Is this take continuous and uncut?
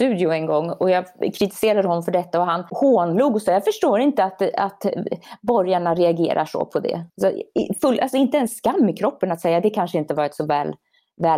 no; 2 cuts; at 2.7 s, 7.1 s

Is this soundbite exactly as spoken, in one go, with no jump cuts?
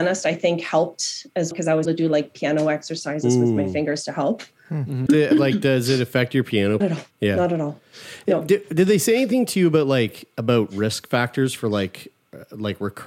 no; 5 cuts; at 1.5 s, 1.9 s, 5.1 s, 6.8 s, 7.1 s

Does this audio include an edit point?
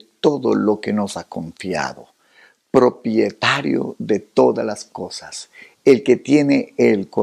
no; 0 cuts

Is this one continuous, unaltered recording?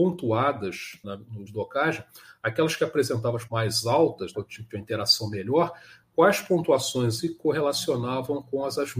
no; 5 cuts; at 1.0 s, 1.5 s, 3.5 s, 4.3 s, 7.2 s

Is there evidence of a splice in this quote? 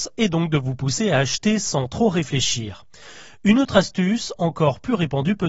no; 0 cuts

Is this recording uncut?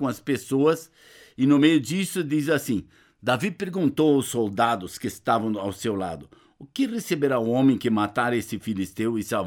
yes; 0 cuts

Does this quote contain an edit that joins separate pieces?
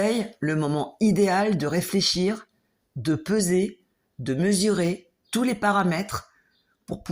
no; 0 cuts

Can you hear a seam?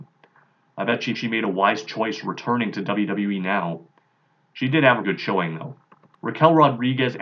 yes; 2 cuts; at 1.1 s, 5.0 s

